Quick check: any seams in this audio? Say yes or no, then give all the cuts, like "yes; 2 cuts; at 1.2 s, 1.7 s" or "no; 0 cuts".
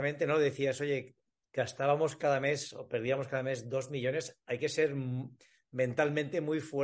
no; 0 cuts